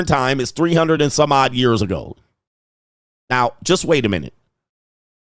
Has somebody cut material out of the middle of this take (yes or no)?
no